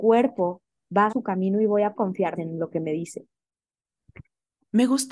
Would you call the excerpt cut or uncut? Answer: cut